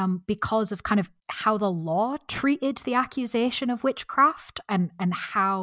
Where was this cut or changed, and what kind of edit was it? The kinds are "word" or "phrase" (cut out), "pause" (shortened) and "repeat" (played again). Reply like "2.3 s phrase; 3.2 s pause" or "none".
1.2 s pause